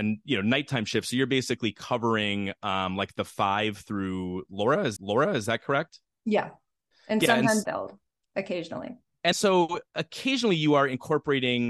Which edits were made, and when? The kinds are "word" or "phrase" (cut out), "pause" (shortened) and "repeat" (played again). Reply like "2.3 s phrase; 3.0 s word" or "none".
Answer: 5.0 s repeat; 7.6 s word; 9.3 s word; 9.9 s pause